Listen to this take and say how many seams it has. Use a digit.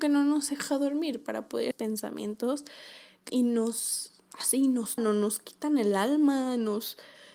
3